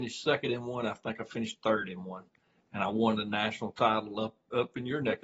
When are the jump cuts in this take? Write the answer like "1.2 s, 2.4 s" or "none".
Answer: none